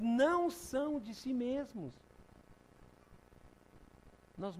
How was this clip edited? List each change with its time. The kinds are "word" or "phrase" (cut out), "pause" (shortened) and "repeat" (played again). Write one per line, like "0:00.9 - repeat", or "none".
none